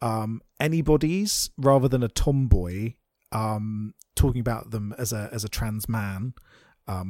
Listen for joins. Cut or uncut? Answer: uncut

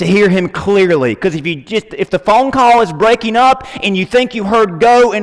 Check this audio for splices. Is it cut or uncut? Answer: uncut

